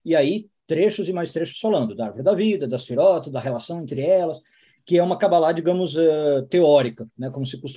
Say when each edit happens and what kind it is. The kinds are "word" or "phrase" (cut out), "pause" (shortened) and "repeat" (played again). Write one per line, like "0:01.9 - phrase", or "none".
none